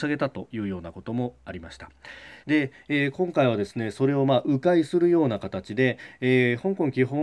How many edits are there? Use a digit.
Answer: 1